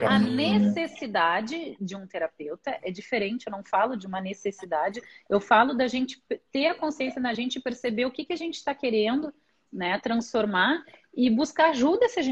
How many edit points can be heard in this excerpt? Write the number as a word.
zero